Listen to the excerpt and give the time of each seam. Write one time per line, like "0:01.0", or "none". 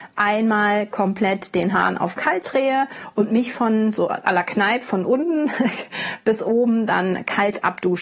none